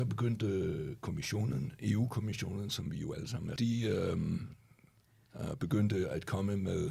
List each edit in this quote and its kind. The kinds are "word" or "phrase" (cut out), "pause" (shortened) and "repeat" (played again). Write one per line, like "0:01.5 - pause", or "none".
0:03.6 - phrase